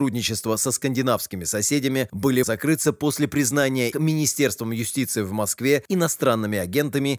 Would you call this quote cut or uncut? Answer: cut